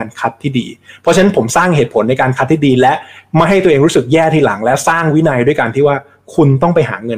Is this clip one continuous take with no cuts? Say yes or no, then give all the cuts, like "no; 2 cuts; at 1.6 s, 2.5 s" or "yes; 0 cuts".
yes; 0 cuts